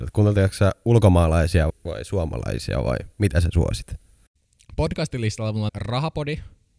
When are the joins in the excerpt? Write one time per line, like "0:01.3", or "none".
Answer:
0:01.7
0:05.7